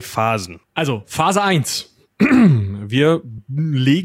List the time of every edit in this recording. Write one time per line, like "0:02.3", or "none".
none

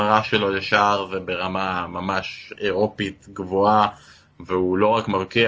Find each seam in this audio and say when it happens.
none

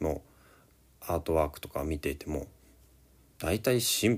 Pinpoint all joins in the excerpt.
none

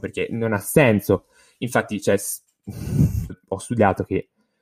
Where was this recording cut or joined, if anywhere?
0:03.3

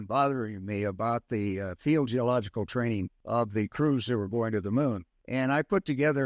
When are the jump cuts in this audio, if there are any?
none

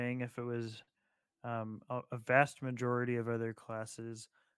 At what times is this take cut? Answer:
none

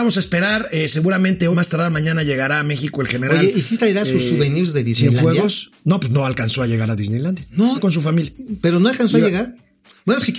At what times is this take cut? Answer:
0:01.5
0:07.8

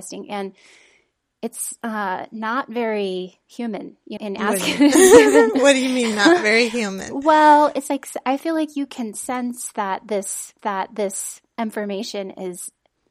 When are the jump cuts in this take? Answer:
0:04.2
0:10.6

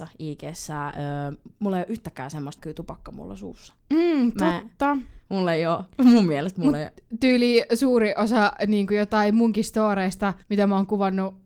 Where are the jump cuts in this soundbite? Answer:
0:02.6
0:03.8
0:10.4

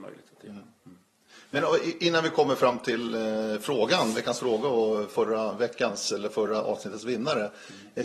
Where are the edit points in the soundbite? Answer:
none

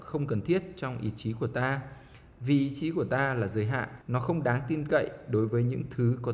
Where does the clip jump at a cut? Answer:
0:04.0

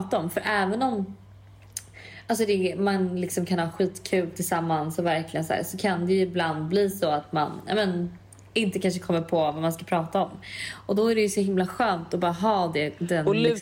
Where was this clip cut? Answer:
none

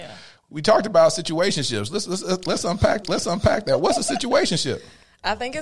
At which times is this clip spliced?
0:03.0

